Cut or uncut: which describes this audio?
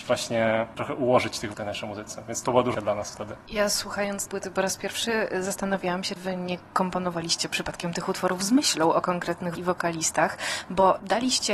cut